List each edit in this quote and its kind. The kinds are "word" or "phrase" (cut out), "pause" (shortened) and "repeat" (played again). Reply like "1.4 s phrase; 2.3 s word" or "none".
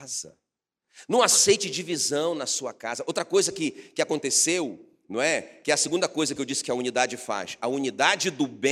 none